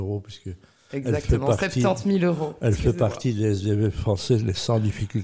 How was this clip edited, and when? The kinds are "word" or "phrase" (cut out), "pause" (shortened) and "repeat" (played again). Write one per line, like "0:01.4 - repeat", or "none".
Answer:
none